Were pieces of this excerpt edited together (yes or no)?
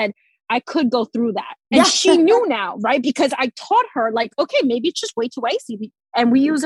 yes